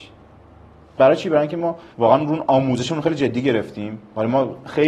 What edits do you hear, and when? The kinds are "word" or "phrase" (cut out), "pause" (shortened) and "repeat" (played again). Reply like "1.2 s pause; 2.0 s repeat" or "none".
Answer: 1.9 s pause